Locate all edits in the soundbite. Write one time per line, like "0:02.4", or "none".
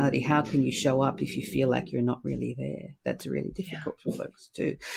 none